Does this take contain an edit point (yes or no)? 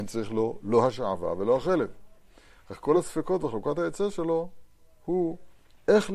no